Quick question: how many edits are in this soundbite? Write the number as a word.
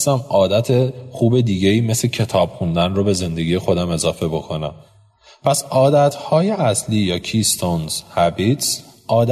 zero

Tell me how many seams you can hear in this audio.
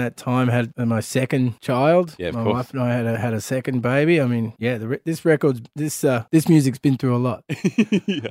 zero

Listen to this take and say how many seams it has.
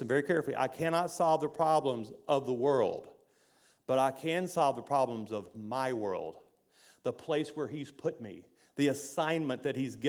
zero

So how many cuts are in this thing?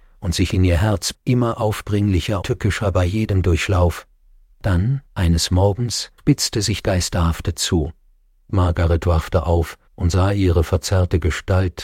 six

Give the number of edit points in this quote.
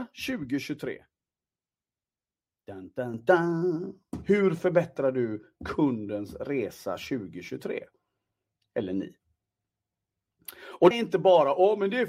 one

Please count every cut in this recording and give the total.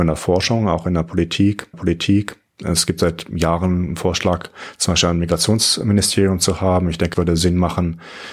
two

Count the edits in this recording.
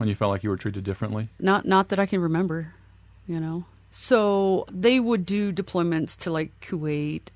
one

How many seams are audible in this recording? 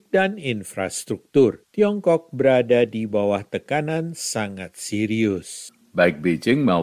zero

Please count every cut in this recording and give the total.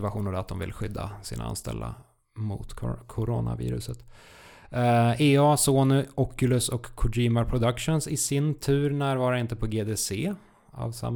zero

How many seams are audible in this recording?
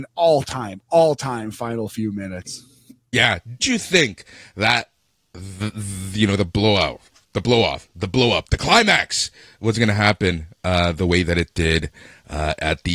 one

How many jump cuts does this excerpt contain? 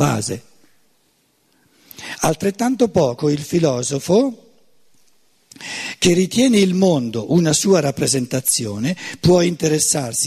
zero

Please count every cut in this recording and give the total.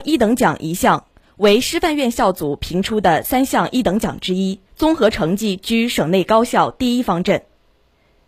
one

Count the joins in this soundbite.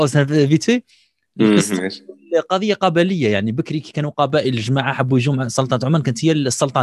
zero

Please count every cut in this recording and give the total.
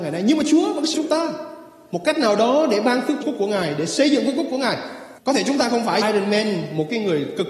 four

